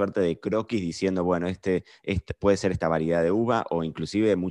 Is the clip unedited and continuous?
yes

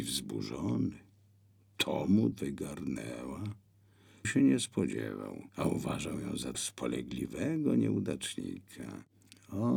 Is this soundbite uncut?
no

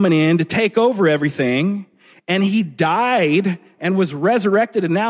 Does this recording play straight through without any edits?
yes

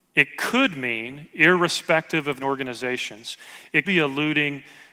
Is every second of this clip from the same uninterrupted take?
no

